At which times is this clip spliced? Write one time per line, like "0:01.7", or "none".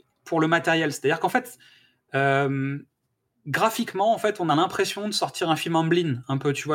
none